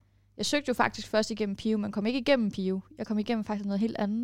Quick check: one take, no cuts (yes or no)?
yes